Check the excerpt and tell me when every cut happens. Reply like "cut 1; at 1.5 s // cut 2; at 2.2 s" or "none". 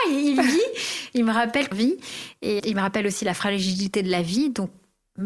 cut 1; at 1.7 s // cut 2; at 2.6 s